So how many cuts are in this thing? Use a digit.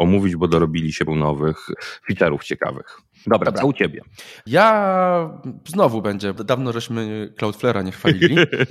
2